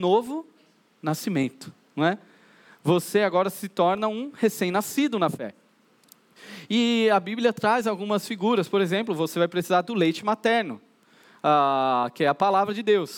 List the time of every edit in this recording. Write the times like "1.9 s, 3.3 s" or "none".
none